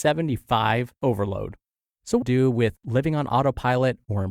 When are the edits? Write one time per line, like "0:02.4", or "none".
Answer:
0:01.0
0:02.2